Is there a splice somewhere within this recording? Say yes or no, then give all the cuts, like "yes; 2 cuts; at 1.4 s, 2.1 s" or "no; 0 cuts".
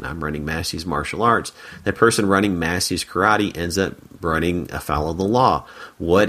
no; 0 cuts